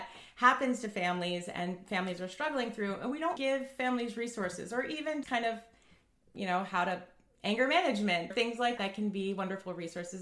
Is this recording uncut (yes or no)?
no